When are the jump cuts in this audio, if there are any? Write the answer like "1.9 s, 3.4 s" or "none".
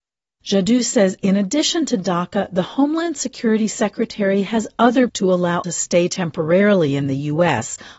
5.1 s, 5.6 s